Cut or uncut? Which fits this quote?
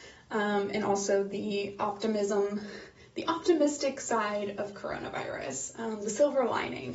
uncut